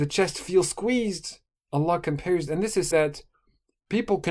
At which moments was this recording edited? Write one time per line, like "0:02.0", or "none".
0:01.6
0:02.5
0:02.9